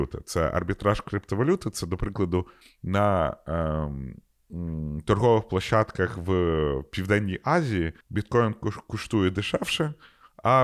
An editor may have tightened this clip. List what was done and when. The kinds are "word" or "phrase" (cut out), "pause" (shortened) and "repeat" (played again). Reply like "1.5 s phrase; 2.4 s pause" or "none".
2.6 s pause; 8.0 s pause